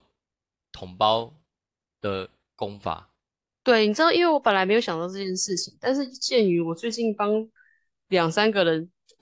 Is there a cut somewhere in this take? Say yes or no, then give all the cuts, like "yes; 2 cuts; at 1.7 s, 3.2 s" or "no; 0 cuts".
no; 0 cuts